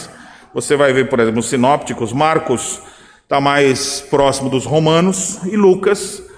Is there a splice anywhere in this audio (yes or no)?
no